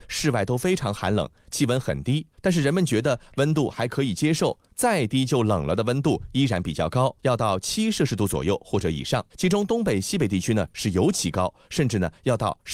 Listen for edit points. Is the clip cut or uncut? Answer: cut